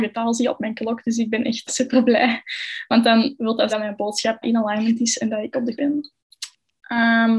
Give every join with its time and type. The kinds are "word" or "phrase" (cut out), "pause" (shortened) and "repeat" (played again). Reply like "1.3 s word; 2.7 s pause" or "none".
1.7 s word; 3.7 s word; 4.4 s word; 5.7 s phrase

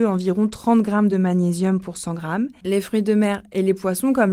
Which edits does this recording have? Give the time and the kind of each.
none

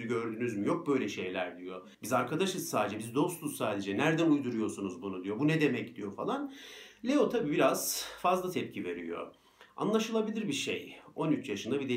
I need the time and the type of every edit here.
1.9 s pause

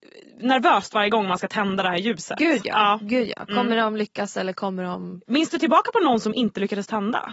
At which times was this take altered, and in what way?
none

